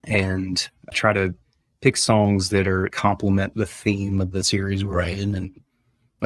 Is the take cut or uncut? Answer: cut